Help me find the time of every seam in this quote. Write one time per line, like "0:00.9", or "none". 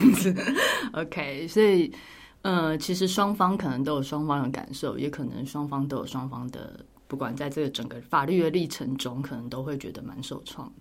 none